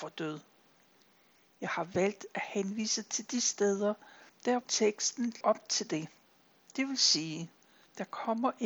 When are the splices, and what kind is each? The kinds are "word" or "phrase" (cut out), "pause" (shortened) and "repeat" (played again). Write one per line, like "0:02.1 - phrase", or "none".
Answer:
0:04.6 - word
0:05.4 - word